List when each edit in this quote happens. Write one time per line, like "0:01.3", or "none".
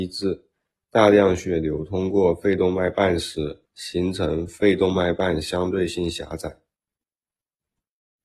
0:03.7